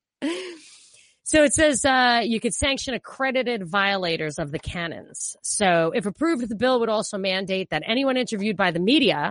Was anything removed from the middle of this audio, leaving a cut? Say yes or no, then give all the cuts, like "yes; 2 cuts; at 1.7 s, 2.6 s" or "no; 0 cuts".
no; 0 cuts